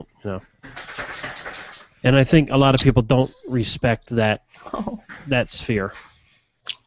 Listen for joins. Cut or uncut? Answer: uncut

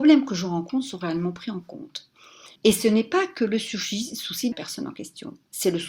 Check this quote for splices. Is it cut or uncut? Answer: cut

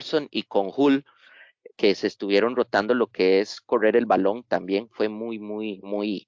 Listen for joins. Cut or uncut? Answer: uncut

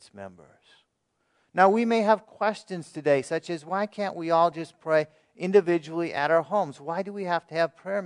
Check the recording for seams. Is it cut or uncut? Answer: uncut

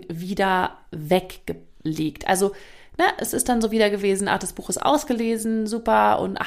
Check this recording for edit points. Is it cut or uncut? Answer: uncut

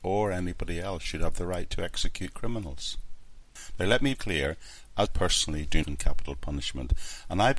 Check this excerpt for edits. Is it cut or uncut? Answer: cut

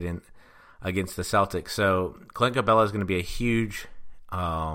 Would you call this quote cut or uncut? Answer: uncut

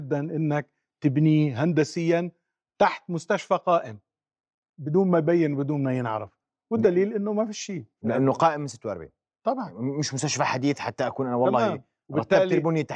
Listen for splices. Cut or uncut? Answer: uncut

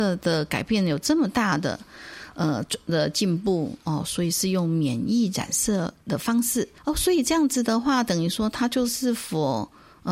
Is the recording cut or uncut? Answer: cut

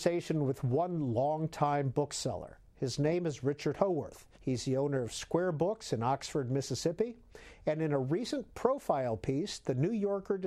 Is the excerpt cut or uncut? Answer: cut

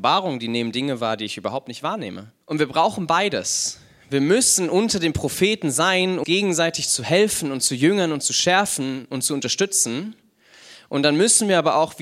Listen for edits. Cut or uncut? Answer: cut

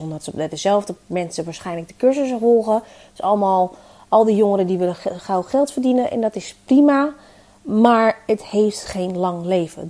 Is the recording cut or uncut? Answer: uncut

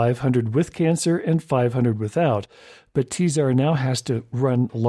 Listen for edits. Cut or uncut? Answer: uncut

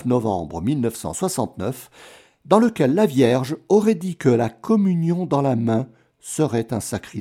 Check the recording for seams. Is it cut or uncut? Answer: uncut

